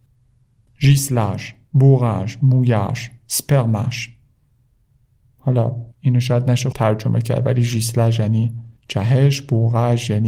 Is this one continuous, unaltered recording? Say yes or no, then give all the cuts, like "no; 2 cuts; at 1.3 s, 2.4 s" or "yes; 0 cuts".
no; 3 cuts; at 5.9 s, 6.7 s, 8.8 s